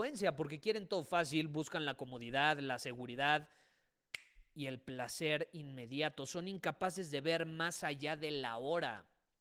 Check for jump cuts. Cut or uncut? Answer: uncut